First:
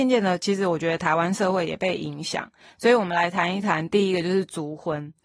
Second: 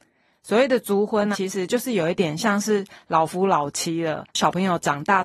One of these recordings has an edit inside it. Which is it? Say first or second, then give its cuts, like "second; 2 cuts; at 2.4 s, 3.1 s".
second; 1 cut; at 1.3 s